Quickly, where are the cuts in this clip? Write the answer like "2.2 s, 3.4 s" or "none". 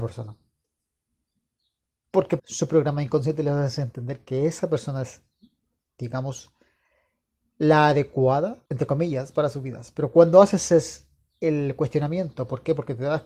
2.4 s, 8.7 s